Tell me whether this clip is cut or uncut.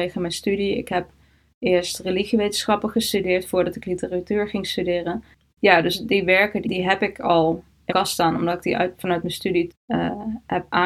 cut